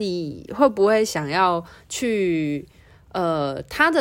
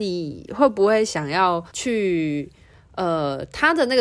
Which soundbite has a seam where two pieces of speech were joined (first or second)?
second